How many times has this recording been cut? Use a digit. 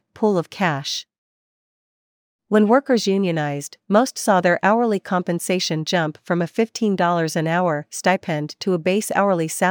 0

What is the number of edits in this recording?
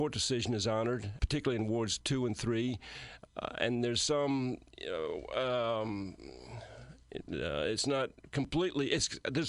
1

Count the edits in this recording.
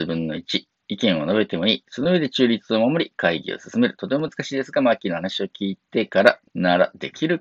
2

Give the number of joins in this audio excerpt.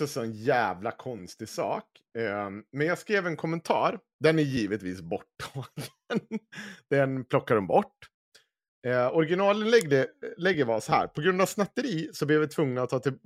0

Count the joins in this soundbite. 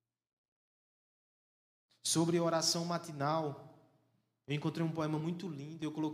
0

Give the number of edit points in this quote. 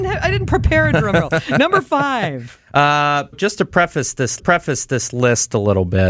2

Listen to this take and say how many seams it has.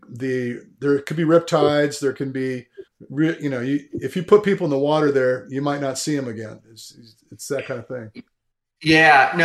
1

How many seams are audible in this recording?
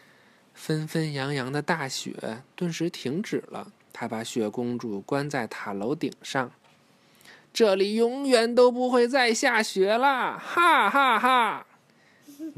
1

